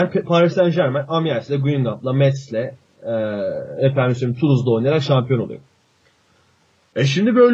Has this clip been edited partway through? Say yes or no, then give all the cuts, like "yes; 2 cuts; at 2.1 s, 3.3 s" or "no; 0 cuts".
no; 0 cuts